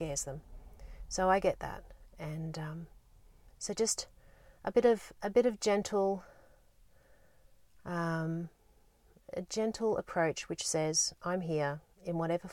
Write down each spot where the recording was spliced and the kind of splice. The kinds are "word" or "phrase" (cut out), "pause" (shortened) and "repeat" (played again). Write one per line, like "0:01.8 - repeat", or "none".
none

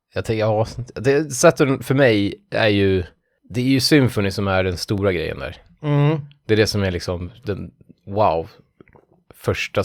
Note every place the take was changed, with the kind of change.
none

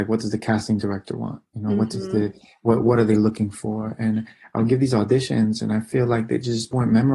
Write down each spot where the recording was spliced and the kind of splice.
0:02.8 - word

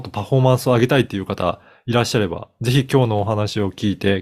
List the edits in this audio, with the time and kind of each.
none

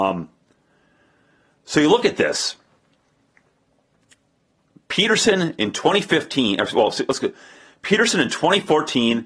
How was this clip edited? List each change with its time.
none

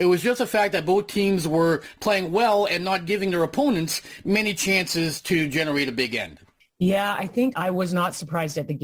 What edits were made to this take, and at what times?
0:07.5 - word

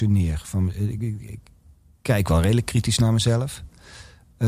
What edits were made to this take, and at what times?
none

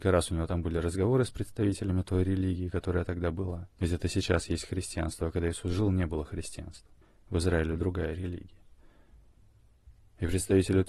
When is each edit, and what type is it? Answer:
0:03.7 - pause
0:07.0 - pause

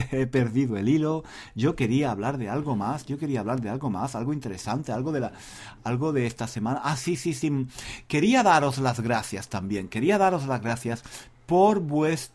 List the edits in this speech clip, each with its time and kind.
none

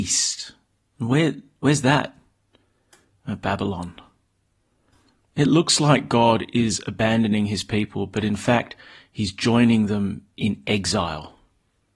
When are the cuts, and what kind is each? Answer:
none

